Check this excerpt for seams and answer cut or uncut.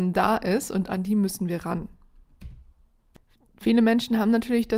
uncut